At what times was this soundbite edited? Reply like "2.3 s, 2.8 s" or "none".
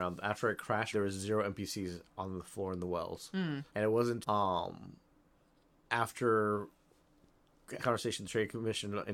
0.9 s, 2.1 s, 3.7 s, 4.2 s, 7.8 s